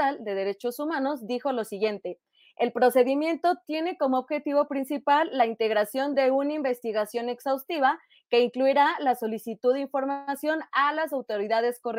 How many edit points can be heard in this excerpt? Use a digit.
0